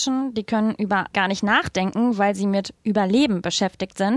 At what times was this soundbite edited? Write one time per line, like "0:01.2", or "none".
0:01.1